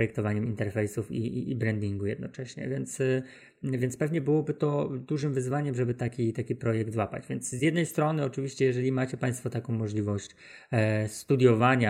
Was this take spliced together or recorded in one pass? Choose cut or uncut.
uncut